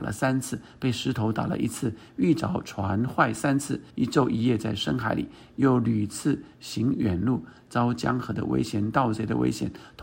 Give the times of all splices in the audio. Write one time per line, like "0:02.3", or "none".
0:03.9

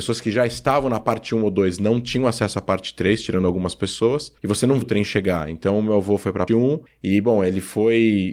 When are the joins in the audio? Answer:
0:04.4
0:04.8
0:06.5
0:06.9

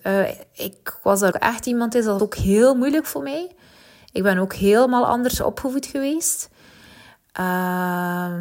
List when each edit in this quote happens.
0:01.3
0:02.2

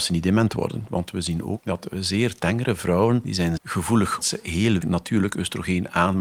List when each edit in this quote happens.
0:01.6
0:03.6
0:04.2
0:04.8

